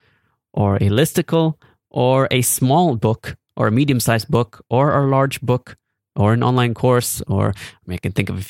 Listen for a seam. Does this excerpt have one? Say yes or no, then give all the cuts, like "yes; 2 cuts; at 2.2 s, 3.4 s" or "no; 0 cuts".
no; 0 cuts